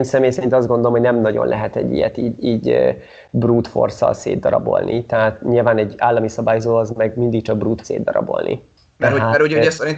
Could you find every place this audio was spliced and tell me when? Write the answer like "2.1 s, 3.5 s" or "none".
7.8 s